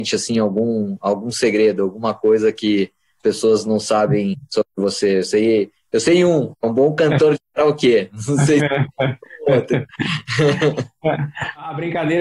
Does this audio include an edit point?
yes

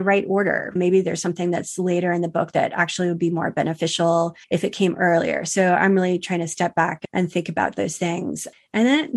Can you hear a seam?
yes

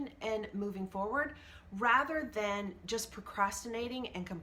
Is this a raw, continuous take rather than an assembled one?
yes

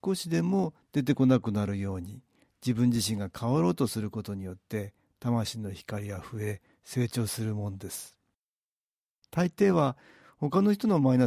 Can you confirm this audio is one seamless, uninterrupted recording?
yes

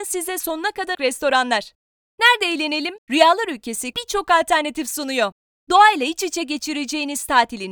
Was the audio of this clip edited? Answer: yes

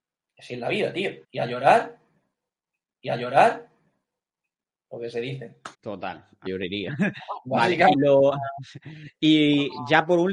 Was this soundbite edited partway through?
yes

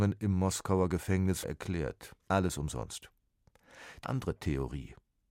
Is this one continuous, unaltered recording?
no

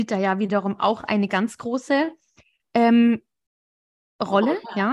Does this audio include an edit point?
no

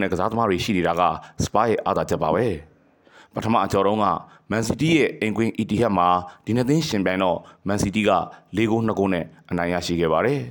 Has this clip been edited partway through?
no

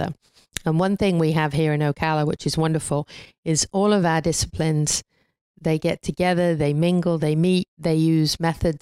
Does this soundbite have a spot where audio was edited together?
no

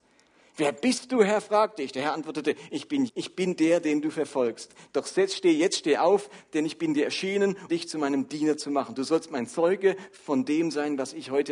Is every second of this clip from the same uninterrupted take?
no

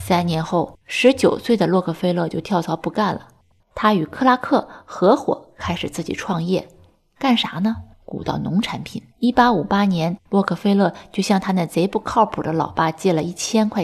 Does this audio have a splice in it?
yes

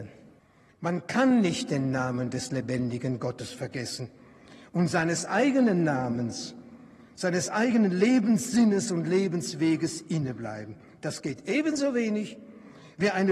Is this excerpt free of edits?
yes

